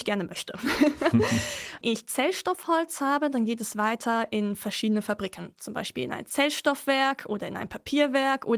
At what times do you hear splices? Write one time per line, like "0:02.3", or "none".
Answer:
0:01.8

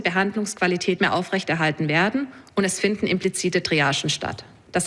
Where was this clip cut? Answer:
0:01.0

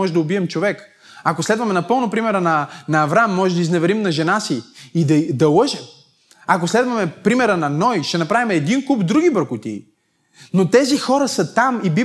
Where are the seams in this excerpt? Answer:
none

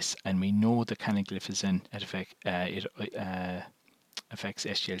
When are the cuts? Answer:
0:01.9
0:03.1

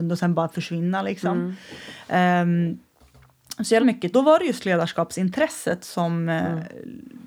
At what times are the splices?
0:03.8
0:04.1

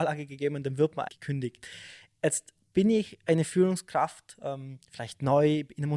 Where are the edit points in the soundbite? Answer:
0:01.1

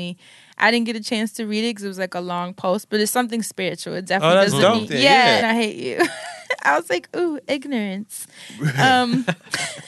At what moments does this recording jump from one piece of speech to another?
0:05.4

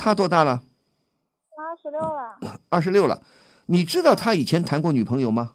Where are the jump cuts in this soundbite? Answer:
none

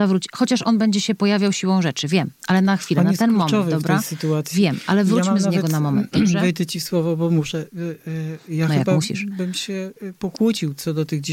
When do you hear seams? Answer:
none

